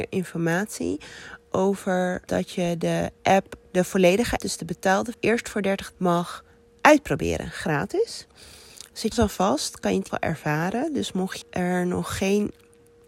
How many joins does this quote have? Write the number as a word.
eight